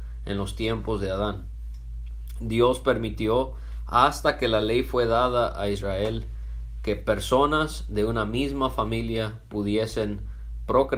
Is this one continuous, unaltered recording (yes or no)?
yes